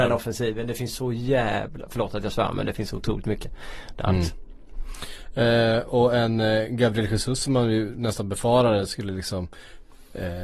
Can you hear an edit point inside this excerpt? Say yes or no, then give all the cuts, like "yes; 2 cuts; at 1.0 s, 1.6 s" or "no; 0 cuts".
no; 0 cuts